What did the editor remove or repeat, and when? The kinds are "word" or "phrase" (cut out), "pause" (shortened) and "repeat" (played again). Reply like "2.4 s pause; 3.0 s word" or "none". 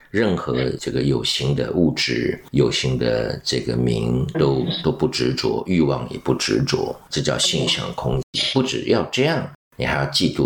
4.3 s phrase